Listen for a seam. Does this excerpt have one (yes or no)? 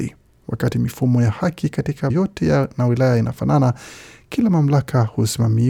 yes